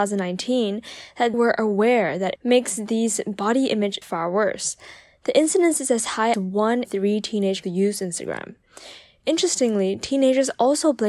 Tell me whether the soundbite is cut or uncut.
cut